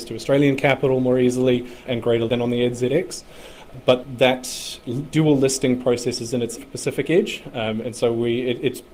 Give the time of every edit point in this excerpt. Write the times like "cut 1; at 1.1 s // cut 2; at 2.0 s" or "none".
cut 1; at 1.9 s // cut 2; at 2.3 s // cut 3; at 6.6 s